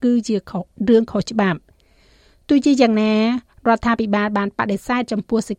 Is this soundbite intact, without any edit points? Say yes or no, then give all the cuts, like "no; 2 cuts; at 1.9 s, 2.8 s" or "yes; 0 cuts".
yes; 0 cuts